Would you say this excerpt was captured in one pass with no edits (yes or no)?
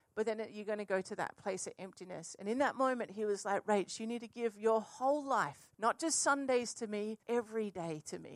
no